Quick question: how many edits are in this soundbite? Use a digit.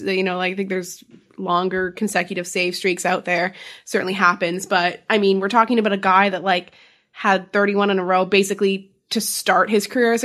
0